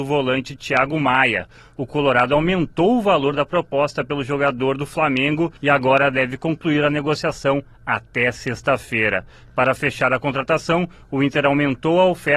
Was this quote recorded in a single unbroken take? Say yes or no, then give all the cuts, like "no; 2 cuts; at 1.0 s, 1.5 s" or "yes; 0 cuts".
no; 1 cut; at 5.6 s